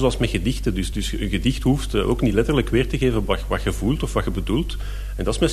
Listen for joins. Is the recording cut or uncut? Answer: uncut